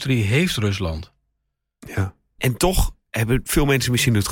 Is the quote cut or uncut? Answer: cut